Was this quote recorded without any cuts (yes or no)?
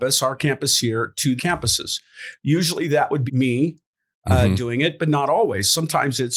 no